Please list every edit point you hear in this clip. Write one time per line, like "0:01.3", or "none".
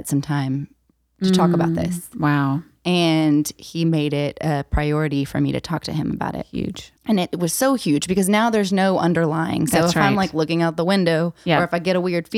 0:07.0